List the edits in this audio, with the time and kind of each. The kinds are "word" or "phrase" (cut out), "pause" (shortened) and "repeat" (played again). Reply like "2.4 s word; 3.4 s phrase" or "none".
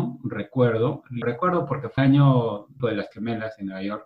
1.2 s word; 2.0 s word; 2.8 s word; 3.1 s word